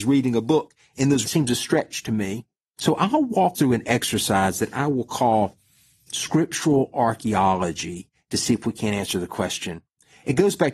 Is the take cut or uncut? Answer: cut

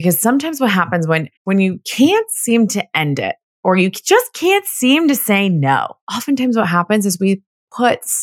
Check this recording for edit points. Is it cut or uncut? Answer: cut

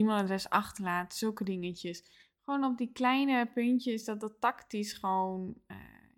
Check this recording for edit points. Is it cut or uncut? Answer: uncut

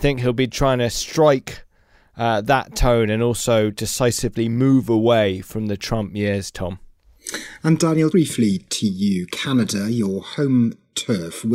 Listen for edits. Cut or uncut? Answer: cut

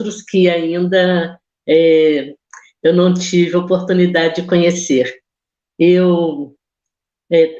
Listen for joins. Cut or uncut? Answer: uncut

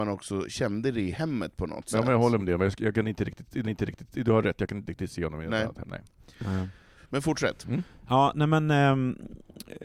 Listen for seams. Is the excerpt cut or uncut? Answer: cut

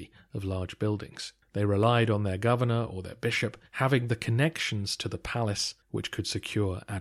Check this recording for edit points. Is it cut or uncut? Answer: cut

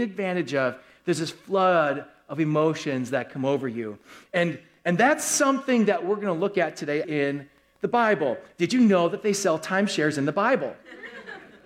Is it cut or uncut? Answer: cut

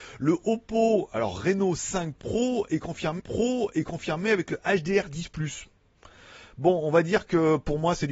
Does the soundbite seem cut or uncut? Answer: cut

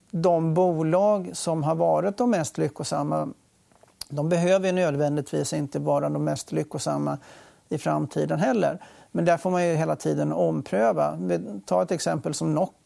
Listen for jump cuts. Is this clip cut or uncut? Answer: uncut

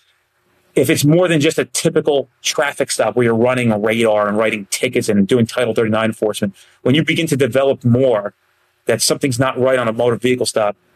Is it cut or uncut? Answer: uncut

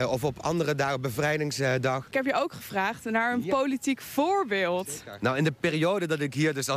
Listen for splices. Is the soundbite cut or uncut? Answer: cut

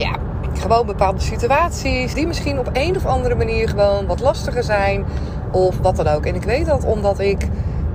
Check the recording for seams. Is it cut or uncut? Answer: cut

